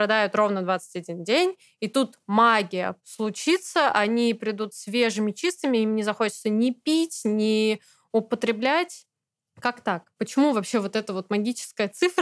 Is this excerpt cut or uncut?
uncut